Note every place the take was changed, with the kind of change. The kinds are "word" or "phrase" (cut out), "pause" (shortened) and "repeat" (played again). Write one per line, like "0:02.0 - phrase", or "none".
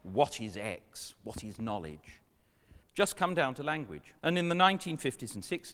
0:02.8 - pause
0:04.2 - pause